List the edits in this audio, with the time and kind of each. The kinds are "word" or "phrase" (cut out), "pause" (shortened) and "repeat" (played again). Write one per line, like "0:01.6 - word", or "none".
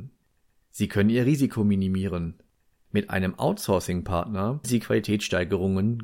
0:04.6 - word